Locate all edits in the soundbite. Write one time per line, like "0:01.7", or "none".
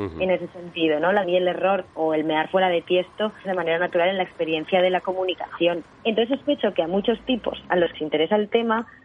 0:01.2
0:01.9
0:03.4
0:05.9
0:07.9